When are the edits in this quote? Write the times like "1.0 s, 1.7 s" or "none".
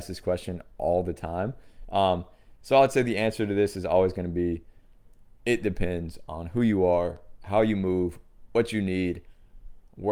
none